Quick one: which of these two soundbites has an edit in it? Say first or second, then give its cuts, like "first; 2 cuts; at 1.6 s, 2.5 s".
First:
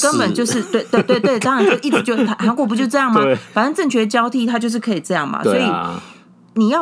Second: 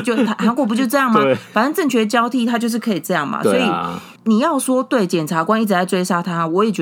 second; 1 cut; at 4.2 s